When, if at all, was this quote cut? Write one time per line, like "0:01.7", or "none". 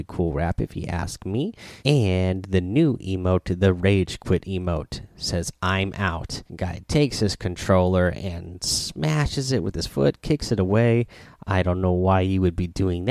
0:01.8
0:06.5